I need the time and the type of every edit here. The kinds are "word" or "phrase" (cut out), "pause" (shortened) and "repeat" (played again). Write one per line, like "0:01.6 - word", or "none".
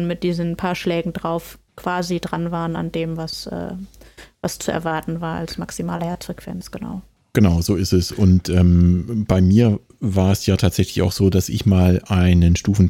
0:01.7 - pause

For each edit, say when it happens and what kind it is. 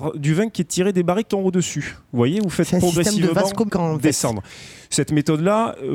0:01.3 - word
0:03.7 - word

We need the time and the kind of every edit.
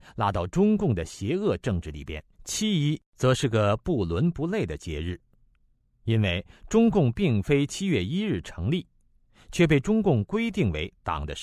0:02.3 - pause

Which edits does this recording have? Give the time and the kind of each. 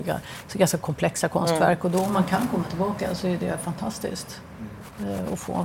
none

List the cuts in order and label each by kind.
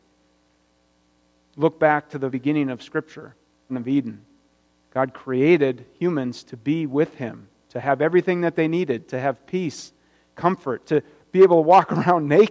0:02.3 - word
0:03.7 - phrase

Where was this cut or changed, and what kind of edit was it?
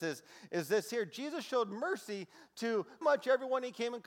0:03.0 - word

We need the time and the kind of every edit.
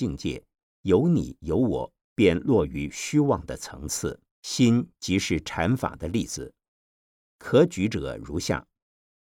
0:02.0 - pause
0:04.3 - pause

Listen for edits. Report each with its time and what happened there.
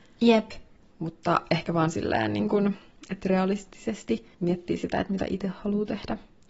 0:04.3 - pause

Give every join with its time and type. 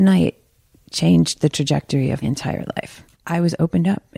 0:02.2 - word
0:03.1 - pause

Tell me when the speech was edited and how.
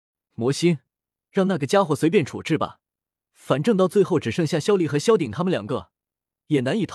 none

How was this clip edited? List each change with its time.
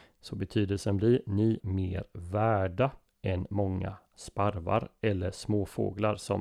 0:01.6 - word

